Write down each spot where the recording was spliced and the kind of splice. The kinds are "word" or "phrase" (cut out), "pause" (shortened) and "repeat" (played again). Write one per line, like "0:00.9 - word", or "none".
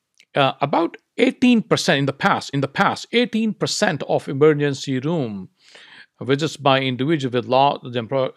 0:02.5 - repeat